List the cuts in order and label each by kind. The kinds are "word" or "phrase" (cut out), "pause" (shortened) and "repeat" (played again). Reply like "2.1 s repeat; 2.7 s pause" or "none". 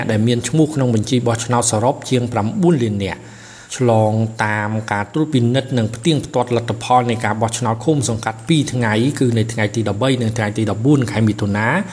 3.7 s pause